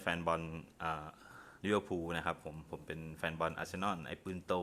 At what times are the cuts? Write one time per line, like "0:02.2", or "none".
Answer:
0:01.6